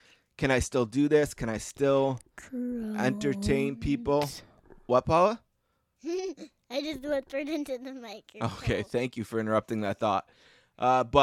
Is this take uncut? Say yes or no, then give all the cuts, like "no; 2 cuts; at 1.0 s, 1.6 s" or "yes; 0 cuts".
yes; 0 cuts